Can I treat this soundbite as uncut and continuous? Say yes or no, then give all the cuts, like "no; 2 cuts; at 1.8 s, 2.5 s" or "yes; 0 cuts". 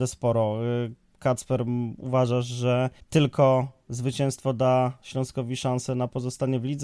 no; 1 cut; at 3.0 s